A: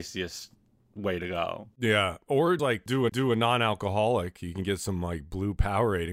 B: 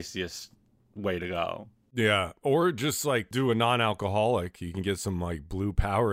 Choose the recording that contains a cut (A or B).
A